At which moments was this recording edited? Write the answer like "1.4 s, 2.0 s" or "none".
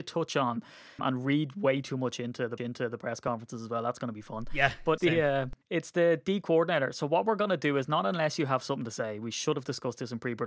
1.0 s, 2.6 s, 5.0 s, 5.6 s